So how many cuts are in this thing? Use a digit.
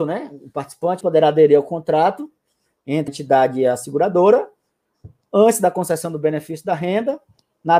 2